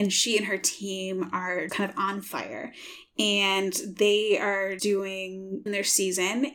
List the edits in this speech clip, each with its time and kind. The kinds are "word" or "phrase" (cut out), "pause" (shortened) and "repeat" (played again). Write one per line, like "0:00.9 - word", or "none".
0:01.7 - word
0:04.8 - word
0:05.7 - phrase